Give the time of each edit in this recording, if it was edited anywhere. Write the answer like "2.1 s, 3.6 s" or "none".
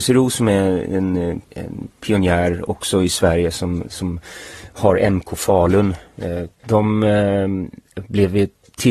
1.4 s, 6.5 s